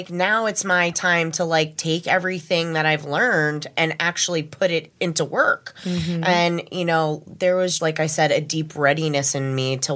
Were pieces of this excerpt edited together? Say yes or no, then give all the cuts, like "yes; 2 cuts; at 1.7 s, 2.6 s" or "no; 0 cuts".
yes; 2 cuts; at 4.9 s, 7.8 s